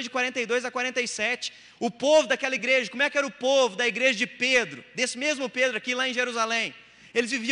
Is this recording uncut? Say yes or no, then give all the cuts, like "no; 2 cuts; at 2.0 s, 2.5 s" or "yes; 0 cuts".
yes; 0 cuts